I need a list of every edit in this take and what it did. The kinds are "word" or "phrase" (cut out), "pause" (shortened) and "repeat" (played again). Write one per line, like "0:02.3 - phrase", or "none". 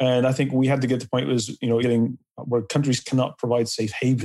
0:01.8 - word